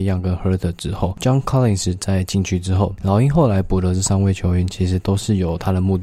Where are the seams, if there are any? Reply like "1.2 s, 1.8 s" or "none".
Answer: none

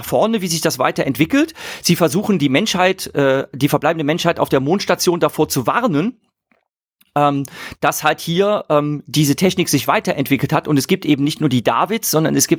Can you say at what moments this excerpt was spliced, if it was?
none

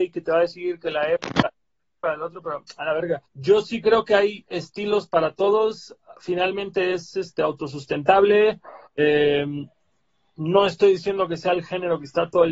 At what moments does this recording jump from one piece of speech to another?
2.0 s, 3.3 s, 8.9 s

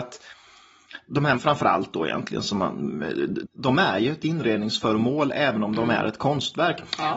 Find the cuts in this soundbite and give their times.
1.3 s, 3.4 s

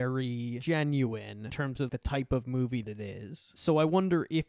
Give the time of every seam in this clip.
1.5 s, 1.9 s, 2.8 s

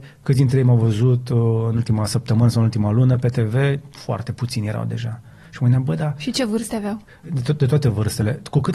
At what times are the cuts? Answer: 7.1 s

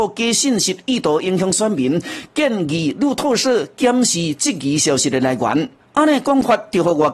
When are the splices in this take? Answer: none

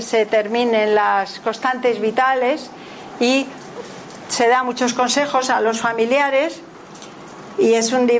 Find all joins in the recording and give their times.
none

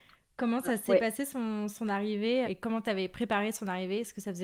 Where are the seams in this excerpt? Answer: 2.4 s

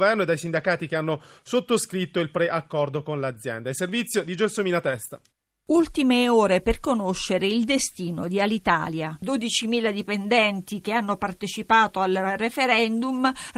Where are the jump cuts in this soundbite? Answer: none

